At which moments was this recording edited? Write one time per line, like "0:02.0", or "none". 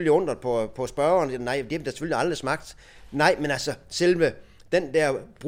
none